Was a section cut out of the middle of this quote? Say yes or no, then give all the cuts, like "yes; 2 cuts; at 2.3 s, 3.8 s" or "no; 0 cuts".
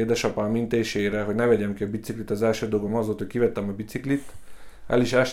no; 0 cuts